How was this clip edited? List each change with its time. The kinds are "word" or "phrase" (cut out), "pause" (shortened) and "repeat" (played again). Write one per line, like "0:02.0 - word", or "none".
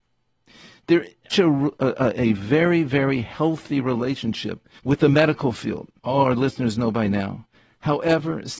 0:01.3 - phrase
0:04.8 - pause
0:06.0 - pause